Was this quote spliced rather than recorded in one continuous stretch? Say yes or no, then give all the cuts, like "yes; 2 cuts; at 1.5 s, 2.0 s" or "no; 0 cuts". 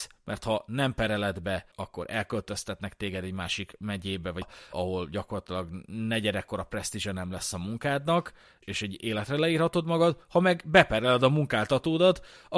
yes; 4 cuts; at 1.7 s, 4.4 s, 4.7 s, 8.6 s